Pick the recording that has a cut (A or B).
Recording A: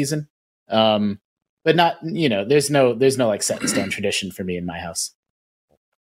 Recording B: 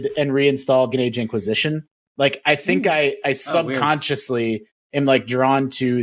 B